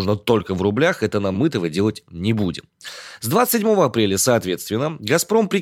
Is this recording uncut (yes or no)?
no